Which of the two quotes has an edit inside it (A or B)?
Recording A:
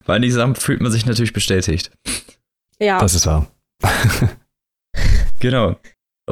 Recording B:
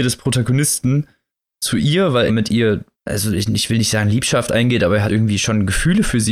B